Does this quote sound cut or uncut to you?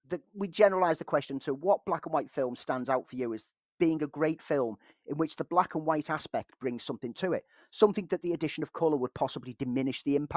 uncut